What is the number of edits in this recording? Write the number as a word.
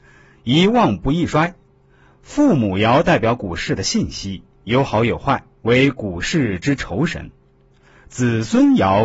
zero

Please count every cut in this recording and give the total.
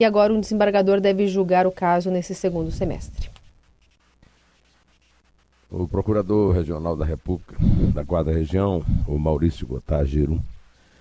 zero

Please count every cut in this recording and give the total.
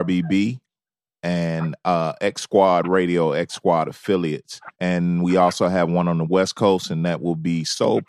one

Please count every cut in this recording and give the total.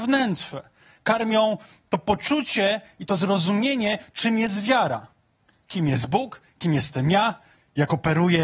zero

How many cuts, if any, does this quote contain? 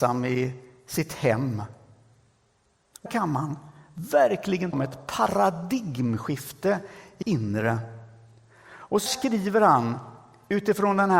four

